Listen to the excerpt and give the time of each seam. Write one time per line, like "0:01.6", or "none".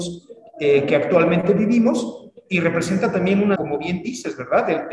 0:03.6